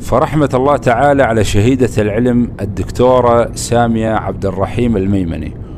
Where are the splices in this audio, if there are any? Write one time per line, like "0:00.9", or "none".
none